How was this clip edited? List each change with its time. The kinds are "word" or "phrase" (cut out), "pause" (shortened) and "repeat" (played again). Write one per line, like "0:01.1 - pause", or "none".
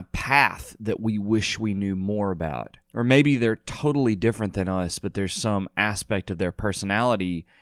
0:02.8 - pause